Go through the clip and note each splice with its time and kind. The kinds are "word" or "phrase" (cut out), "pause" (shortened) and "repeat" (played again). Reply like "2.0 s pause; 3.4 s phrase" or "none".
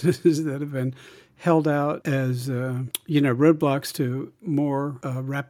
none